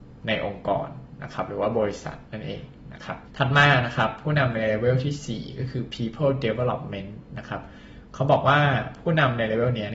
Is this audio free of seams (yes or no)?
yes